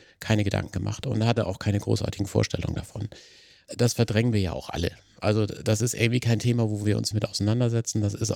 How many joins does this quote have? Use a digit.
1